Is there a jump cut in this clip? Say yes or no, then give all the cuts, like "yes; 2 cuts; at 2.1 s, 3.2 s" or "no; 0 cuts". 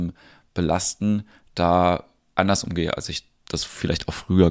no; 0 cuts